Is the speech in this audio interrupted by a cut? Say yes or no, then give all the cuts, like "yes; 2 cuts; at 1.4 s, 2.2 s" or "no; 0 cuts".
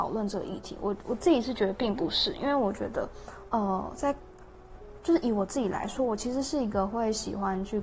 no; 0 cuts